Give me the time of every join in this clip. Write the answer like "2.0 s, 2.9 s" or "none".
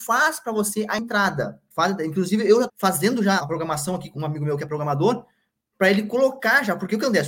1.7 s, 2.7 s, 3.4 s, 4.1 s